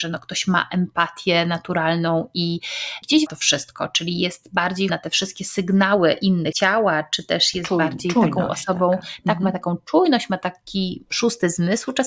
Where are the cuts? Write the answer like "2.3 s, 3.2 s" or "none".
3.3 s, 4.9 s, 6.5 s

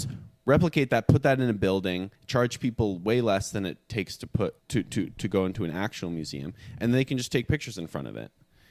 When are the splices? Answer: 2.1 s, 4.6 s

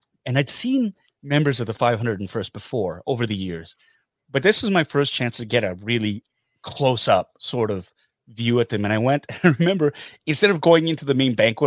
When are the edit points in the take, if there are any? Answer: none

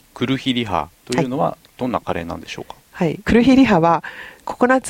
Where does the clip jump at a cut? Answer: 1.0 s, 1.7 s

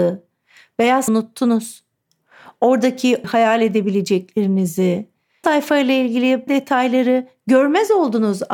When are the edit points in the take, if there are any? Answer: 1.1 s, 3.2 s, 5.4 s, 6.5 s

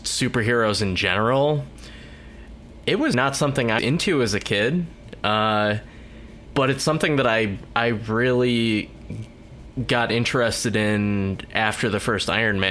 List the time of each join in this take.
3.1 s, 3.8 s

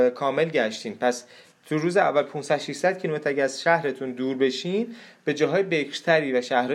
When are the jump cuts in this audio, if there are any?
none

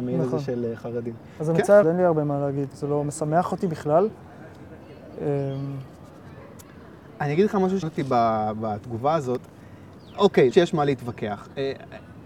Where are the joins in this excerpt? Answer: 1.8 s, 2.7 s, 7.8 s, 10.5 s

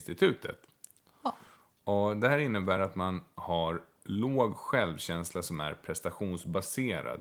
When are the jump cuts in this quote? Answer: none

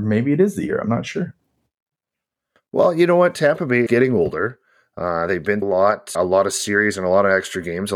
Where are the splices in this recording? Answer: 3.9 s, 5.6 s, 6.1 s

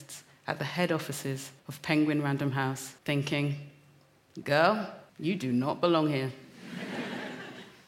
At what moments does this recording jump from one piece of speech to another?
1.6 s, 3.0 s, 5.1 s

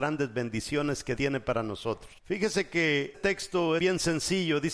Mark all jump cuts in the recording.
1.2 s, 2.2 s, 3.1 s, 3.8 s

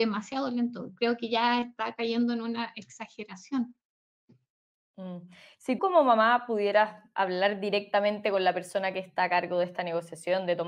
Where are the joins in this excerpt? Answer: 5.8 s

